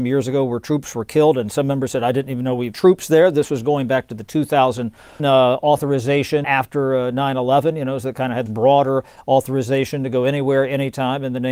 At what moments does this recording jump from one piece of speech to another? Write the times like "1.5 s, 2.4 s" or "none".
2.7 s, 5.2 s, 6.4 s, 8.5 s